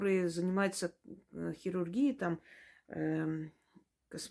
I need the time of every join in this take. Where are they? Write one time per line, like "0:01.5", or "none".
none